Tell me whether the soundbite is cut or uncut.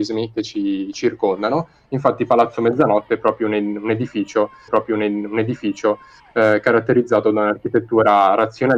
cut